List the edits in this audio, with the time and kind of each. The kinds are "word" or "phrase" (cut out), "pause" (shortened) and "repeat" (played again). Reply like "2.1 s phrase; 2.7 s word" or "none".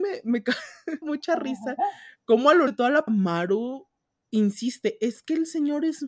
1.0 s phrase; 2.7 s word; 3.1 s word